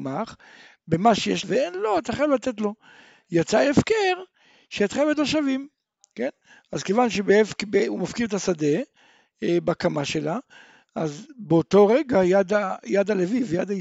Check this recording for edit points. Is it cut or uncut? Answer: cut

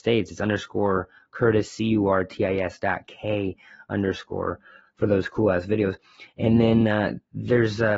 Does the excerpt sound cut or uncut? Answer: uncut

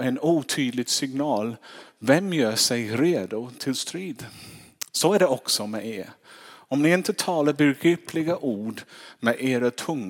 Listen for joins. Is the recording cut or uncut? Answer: cut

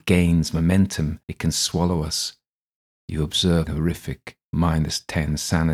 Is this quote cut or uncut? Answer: cut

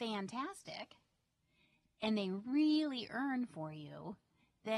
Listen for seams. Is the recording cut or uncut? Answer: uncut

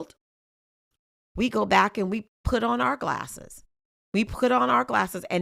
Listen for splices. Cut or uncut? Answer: uncut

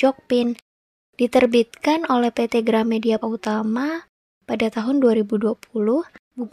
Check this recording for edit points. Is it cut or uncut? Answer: cut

